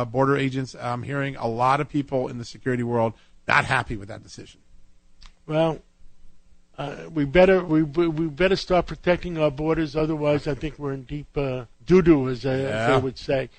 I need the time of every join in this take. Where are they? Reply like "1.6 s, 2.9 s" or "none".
11.7 s